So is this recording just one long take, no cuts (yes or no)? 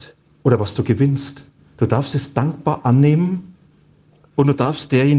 no